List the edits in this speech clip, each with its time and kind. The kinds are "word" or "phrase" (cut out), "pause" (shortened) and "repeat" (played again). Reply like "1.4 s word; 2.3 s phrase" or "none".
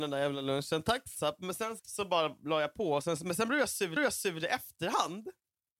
1.1 s word; 1.8 s word; 4.0 s repeat